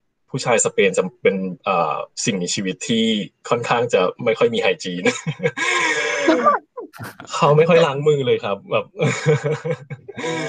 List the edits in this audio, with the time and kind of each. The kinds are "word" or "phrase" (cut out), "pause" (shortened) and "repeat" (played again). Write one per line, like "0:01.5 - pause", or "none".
0:01.6 - pause